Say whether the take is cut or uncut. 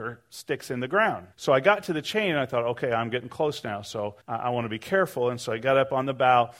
cut